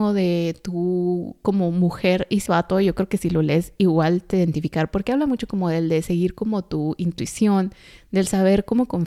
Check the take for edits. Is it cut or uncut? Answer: cut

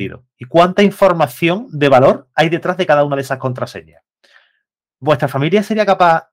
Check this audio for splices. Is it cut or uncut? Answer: uncut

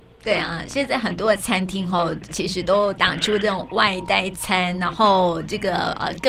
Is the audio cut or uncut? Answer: cut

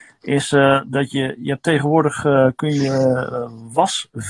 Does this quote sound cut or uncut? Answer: uncut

